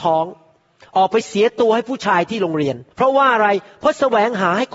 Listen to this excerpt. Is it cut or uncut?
cut